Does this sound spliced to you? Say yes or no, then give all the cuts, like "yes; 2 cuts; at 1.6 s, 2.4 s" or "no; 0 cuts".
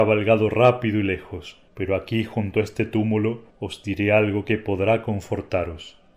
yes; 2 cuts; at 1.7 s, 3.5 s